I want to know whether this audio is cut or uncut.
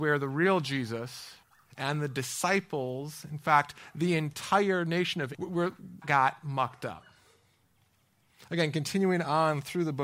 cut